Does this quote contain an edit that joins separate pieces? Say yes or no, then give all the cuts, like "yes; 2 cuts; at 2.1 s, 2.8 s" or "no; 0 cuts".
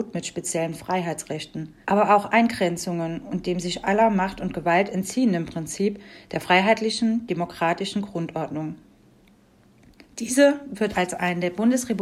yes; 1 cut; at 1.8 s